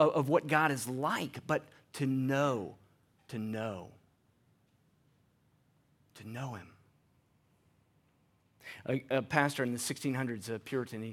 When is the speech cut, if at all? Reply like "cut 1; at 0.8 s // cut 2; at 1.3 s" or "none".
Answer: none